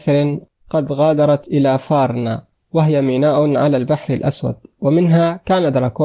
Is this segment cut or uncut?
uncut